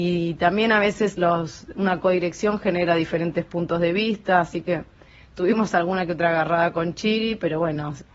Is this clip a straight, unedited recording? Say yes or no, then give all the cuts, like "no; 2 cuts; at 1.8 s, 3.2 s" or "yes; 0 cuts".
yes; 0 cuts